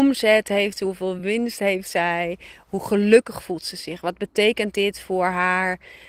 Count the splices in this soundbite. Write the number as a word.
zero